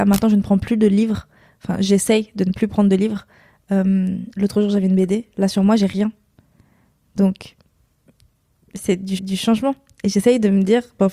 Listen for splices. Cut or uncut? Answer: cut